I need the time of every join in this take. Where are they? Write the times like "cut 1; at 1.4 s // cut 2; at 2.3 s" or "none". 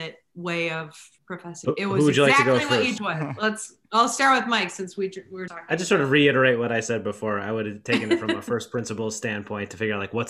cut 1; at 1.6 s // cut 2; at 3.0 s // cut 3; at 5.5 s